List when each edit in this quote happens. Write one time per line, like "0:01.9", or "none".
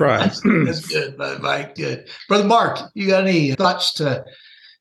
0:01.8
0:03.5